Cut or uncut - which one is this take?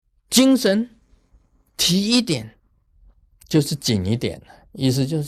uncut